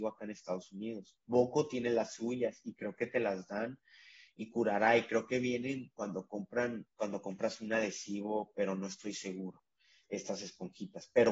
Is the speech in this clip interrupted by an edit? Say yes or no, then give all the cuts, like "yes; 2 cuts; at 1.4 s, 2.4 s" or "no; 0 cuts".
no; 0 cuts